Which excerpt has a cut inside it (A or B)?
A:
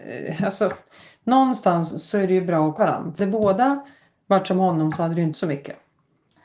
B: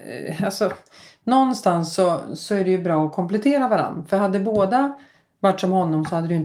A